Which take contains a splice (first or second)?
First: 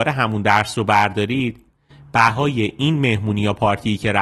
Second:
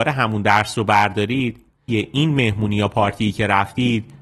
second